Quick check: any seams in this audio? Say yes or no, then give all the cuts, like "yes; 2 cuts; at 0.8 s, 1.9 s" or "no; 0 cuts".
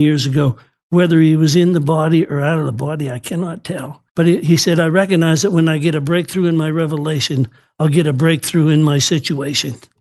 yes; 1 cut; at 4.1 s